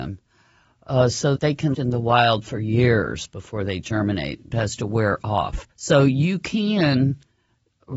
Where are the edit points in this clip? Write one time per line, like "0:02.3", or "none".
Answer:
0:01.4
0:01.7
0:04.5
0:05.7